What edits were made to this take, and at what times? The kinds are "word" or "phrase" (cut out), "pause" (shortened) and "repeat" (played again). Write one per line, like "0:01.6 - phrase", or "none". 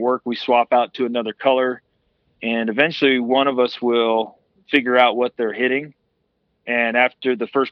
none